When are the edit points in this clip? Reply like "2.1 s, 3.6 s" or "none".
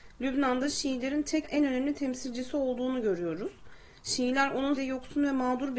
1.4 s, 4.8 s